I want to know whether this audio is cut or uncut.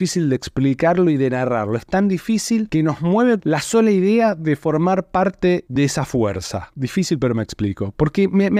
uncut